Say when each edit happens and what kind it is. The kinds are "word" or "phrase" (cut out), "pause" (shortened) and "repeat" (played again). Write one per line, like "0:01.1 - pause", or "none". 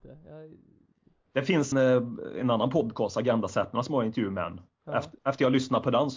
0:01.7 - word